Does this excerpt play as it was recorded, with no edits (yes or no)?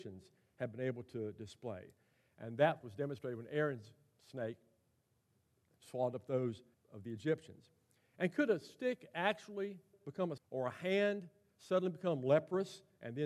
no